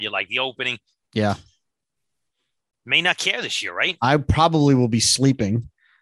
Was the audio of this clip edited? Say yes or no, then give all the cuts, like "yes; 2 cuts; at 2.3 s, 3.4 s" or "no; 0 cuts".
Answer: no; 0 cuts